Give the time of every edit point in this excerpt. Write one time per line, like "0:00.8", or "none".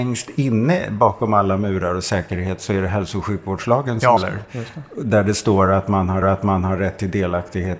0:04.2
0:06.2